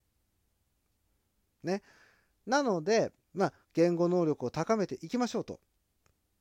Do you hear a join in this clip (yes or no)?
yes